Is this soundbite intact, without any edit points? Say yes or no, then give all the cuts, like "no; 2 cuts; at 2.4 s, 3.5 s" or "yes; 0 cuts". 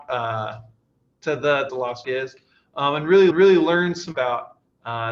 no; 4 cuts; at 1.7 s, 2.0 s, 3.3 s, 4.1 s